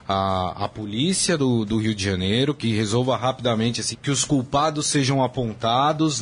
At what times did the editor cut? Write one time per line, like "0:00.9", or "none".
0:03.9